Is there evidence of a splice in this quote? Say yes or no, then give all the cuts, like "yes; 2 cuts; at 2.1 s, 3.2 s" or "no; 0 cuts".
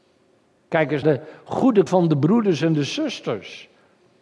yes; 2 cuts; at 1.0 s, 1.9 s